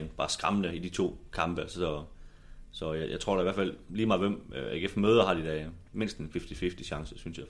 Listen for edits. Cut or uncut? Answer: uncut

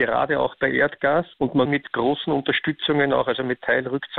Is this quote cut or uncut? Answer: cut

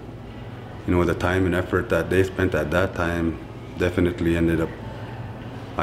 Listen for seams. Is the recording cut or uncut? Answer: uncut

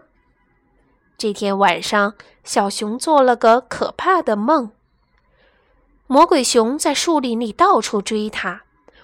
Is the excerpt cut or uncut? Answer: uncut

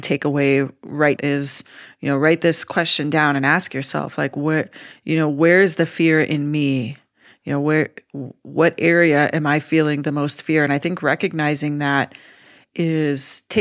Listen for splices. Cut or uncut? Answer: cut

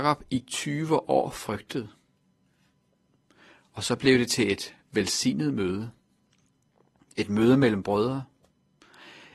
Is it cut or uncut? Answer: uncut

